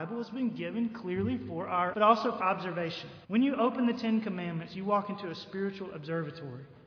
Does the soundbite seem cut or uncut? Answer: cut